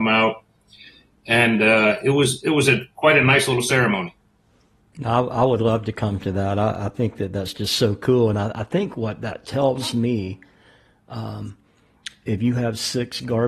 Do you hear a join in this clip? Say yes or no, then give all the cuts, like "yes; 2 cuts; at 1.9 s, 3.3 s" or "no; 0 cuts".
no; 0 cuts